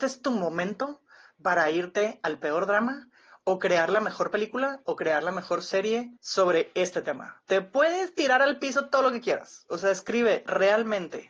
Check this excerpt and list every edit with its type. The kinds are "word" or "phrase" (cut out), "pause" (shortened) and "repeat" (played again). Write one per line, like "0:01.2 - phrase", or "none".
0:06.2 - pause